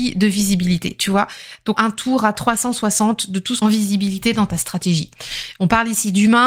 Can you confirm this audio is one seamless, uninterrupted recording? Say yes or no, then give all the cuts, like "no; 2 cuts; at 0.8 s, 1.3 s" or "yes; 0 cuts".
no; 2 cuts; at 1.7 s, 3.6 s